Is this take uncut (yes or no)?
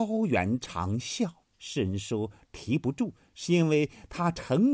no